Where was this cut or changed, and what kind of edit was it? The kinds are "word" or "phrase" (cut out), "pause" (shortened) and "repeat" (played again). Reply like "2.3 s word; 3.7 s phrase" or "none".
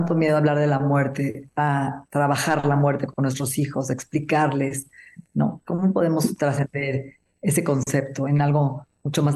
2.1 s pause